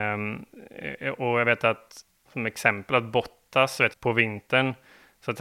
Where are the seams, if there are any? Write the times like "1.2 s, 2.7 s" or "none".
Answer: 2.3 s, 3.9 s